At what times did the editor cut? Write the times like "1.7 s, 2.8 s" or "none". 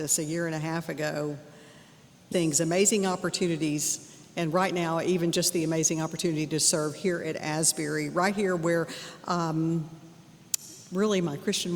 2.3 s